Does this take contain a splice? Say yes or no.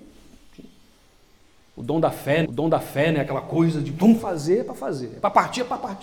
yes